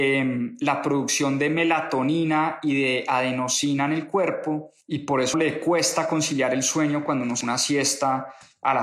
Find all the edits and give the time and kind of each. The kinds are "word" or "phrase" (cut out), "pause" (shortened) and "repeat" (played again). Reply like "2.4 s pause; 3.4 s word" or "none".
4.8 s pause; 5.3 s word; 7.4 s word